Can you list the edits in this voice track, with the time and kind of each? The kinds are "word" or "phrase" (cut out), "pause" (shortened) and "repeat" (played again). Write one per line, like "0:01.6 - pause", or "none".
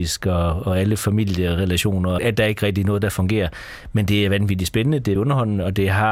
0:02.2 - word
0:05.2 - word